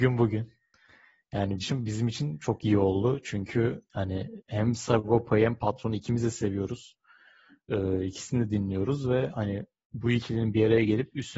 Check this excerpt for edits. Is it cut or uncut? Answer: cut